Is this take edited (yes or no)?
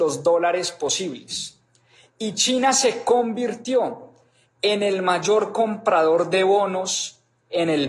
no